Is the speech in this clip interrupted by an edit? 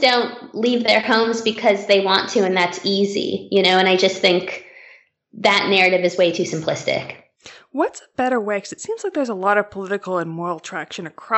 no; 0 cuts

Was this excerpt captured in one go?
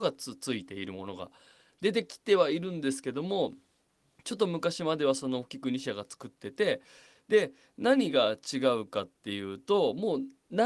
yes; 0 cuts

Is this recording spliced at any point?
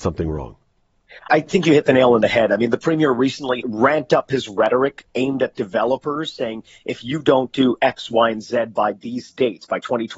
yes; 3 cuts; at 1.3 s, 3.6 s, 5.1 s

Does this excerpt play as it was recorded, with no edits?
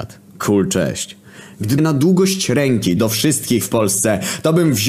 no; 3 cuts; at 1.8 s, 3.0 s, 3.6 s

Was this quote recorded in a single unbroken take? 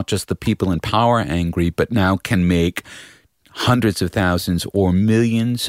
yes; 0 cuts

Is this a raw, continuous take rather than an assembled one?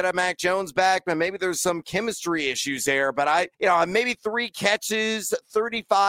no; 1 cut; at 3.5 s

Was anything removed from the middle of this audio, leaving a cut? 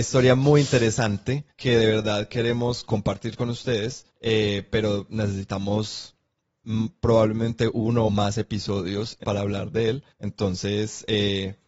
yes; 5 cuts; at 1.5 s, 4.1 s, 8.1 s, 9.2 s, 10.1 s

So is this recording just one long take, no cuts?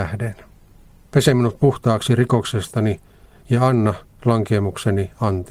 yes; 0 cuts

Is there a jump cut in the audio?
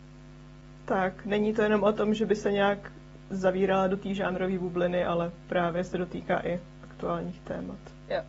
no; 0 cuts

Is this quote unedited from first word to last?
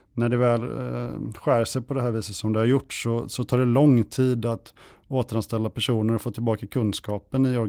yes; 0 cuts

